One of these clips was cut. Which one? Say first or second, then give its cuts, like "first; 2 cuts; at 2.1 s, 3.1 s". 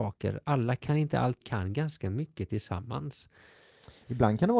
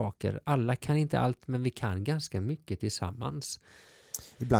first; 1 cut; at 1.4 s